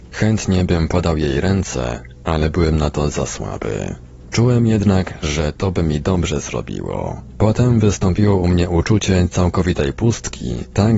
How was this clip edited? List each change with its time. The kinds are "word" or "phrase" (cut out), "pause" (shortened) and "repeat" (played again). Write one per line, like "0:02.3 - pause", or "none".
none